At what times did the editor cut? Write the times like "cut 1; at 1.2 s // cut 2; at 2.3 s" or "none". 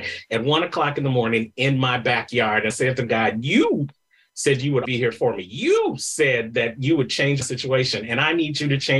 cut 1; at 2.7 s // cut 2; at 4.8 s // cut 3; at 7.4 s